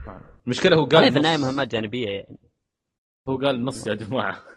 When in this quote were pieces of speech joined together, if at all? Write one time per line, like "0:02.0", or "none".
none